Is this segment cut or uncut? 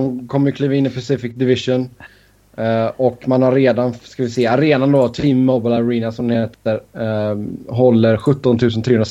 uncut